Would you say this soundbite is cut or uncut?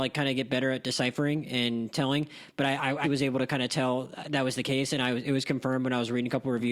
cut